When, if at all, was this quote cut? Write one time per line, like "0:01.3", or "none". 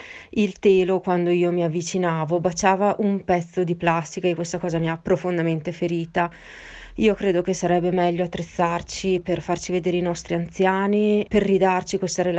0:11.3